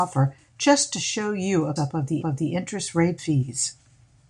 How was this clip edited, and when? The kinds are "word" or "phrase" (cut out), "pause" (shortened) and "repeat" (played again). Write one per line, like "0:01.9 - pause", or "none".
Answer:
0:01.8 - word
0:02.2 - repeat
0:03.2 - word